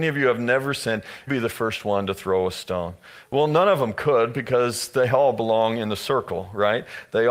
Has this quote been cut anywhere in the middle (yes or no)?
yes